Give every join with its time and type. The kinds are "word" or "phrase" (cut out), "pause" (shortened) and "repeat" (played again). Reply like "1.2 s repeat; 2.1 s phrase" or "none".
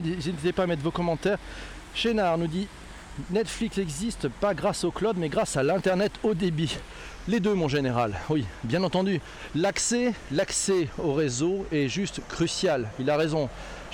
none